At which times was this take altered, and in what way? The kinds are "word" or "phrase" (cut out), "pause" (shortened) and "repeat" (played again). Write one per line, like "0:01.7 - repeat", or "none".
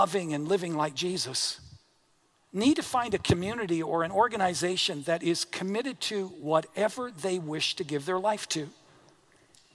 none